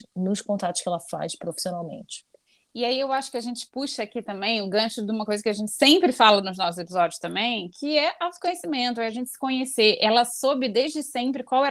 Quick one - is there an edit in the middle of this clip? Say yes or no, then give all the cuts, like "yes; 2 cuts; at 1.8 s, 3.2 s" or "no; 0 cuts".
no; 0 cuts